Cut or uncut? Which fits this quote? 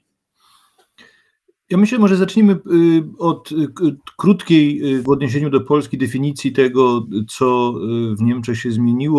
uncut